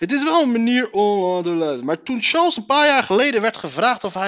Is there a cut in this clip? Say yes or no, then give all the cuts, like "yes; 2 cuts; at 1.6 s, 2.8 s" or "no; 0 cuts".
no; 0 cuts